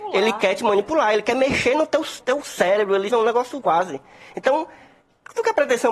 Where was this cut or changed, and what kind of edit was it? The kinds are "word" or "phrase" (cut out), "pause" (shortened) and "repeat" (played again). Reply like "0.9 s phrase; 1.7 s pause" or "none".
2.2 s word; 3.1 s word; 3.6 s word